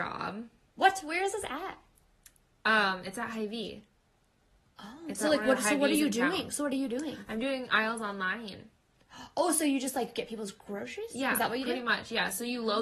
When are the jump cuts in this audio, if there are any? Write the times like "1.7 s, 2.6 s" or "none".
none